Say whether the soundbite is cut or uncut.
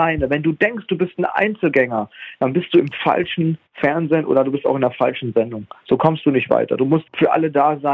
cut